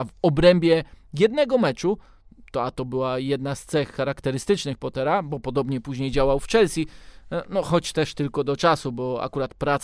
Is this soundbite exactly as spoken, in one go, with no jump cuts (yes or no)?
yes